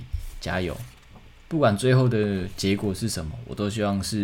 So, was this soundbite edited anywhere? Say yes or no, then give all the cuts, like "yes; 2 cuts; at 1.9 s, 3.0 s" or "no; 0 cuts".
yes; 1 cut; at 1.4 s